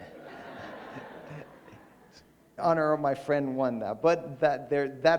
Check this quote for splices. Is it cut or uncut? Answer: cut